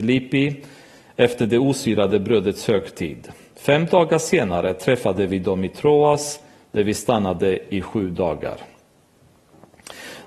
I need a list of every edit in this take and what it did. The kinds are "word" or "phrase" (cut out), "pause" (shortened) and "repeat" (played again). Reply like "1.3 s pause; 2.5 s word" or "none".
none